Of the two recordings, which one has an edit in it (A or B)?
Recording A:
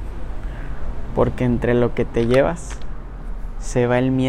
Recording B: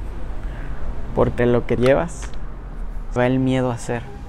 B